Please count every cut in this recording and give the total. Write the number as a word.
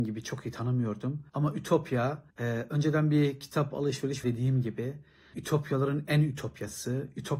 four